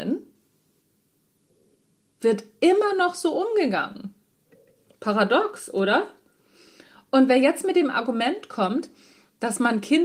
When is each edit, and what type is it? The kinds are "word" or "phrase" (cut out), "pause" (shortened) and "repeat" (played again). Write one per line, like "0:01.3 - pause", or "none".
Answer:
none